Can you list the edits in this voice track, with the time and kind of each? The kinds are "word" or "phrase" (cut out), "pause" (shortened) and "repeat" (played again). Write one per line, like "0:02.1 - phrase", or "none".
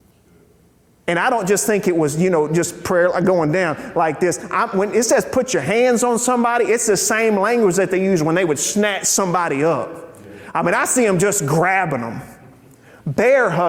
none

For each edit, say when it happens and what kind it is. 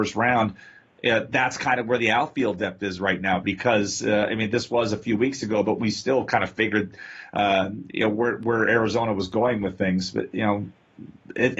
none

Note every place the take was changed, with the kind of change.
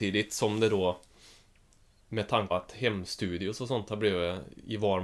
0:02.5 - word

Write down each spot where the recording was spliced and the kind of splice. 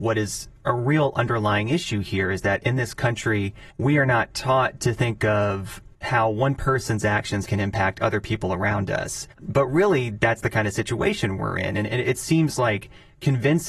0:03.7 - pause
0:06.0 - pause
0:09.3 - pause

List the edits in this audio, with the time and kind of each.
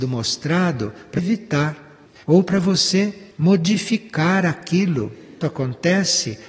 0:01.2 - word
0:02.2 - pause
0:05.4 - word

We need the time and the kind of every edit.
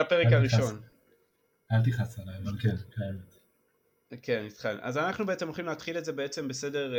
none

